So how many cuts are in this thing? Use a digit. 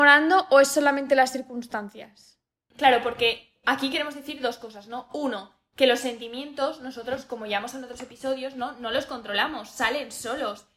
0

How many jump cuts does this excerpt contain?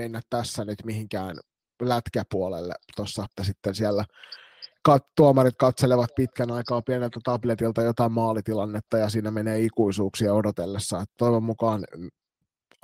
1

